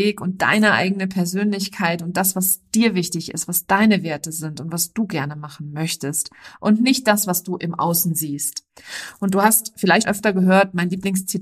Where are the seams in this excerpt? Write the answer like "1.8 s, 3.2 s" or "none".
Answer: 10.0 s

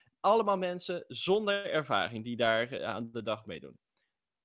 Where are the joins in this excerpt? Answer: 2.8 s

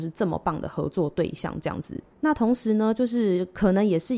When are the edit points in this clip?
2.1 s

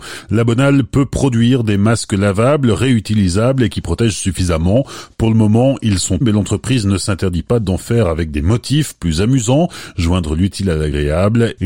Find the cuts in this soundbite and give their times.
6.2 s

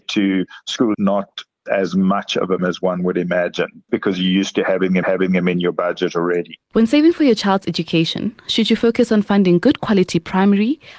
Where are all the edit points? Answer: 0.9 s, 1.7 s, 2.6 s, 3.9 s, 5.0 s, 6.6 s

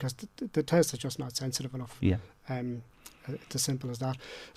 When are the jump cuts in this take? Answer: none

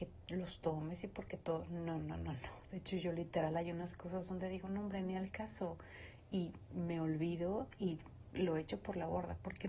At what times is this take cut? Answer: 2.0 s

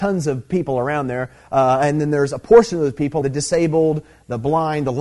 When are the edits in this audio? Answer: 3.2 s

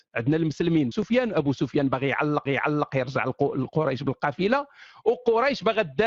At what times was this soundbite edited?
0.9 s, 2.5 s

